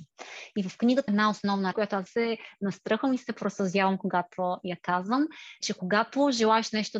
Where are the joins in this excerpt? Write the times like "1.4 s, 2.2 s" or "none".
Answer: 1.1 s, 1.7 s, 2.1 s, 5.6 s